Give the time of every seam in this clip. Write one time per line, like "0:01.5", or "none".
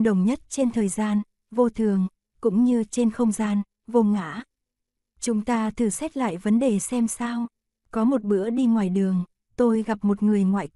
none